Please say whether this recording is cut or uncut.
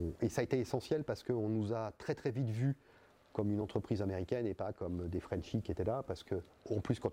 uncut